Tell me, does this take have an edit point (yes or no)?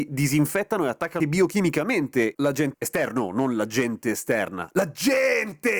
yes